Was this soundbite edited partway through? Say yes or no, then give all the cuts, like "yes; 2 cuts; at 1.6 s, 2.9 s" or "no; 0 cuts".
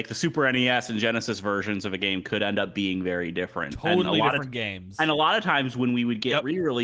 no; 0 cuts